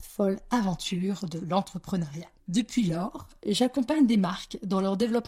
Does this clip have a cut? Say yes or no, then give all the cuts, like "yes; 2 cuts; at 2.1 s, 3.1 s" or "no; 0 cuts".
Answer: yes; 1 cut; at 2.4 s